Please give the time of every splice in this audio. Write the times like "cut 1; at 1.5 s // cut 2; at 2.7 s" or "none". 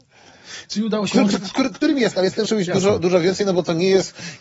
cut 1; at 2.5 s